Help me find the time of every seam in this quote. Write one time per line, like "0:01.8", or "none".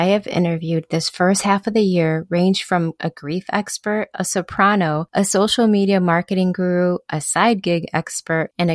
none